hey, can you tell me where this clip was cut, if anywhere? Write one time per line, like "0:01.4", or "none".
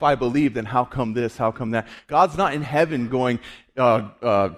none